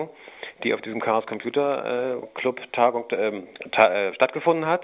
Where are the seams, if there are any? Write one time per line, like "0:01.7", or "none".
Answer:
0:02.2

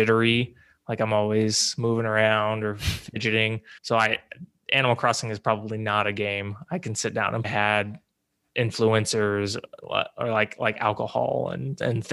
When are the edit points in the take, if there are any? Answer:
0:03.8
0:07.4

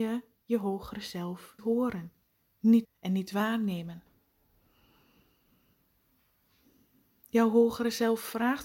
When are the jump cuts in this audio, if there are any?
0:01.6
0:02.8

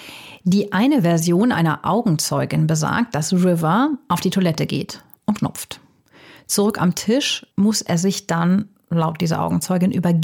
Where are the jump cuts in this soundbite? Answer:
0:05.4
0:07.5

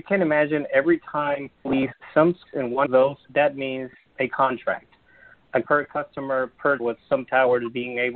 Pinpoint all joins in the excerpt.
0:01.6
0:02.5
0:02.9
0:03.2
0:05.6
0:06.8

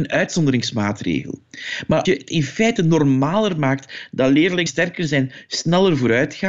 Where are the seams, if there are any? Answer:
0:02.0
0:04.7

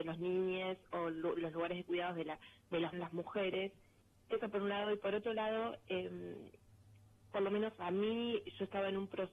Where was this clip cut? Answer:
0:02.9
0:04.0

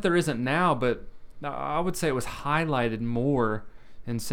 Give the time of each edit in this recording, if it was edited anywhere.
none

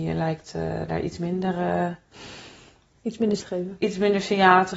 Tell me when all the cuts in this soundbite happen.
0:03.4

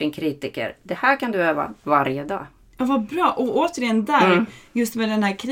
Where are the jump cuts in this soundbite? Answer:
none

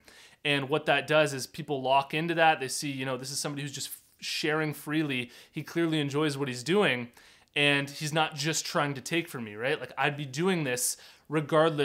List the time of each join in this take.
none

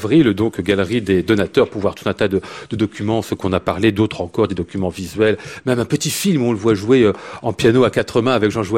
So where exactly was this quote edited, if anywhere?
none

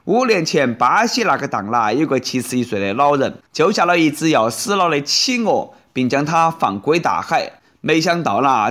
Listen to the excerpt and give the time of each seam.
0:03.5

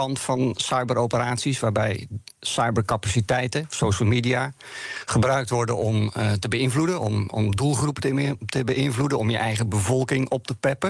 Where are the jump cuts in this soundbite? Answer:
0:02.3

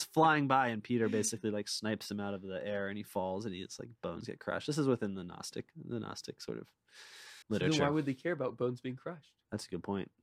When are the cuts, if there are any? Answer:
0:07.4

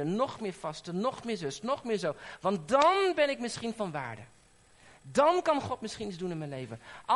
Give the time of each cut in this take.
none

